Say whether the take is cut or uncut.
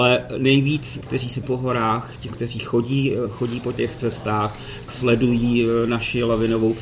cut